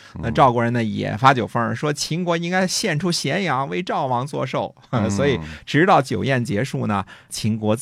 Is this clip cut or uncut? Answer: uncut